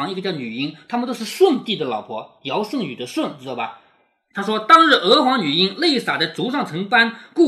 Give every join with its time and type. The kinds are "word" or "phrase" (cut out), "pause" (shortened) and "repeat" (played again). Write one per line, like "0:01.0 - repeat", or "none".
none